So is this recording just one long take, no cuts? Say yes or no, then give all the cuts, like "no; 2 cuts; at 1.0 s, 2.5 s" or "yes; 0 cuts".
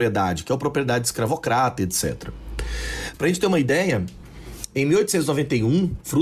yes; 0 cuts